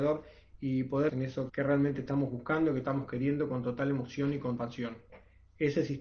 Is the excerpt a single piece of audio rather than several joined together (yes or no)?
no